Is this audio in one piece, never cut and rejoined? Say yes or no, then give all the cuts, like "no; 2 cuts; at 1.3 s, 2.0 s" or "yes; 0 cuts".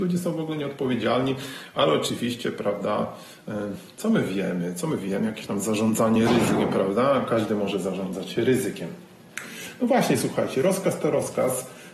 yes; 0 cuts